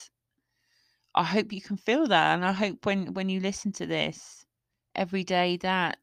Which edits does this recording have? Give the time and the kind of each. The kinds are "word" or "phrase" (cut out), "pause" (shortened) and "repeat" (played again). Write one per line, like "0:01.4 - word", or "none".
0:04.7 - pause

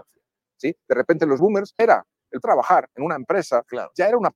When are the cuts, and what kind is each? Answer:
0:01.4 - word
0:01.8 - phrase
0:02.4 - word

